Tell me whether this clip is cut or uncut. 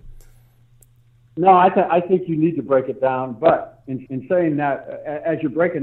cut